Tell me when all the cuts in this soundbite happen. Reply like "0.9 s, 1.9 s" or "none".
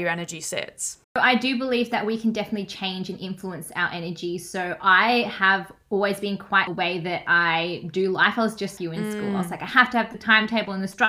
1.0 s, 6.7 s, 8.8 s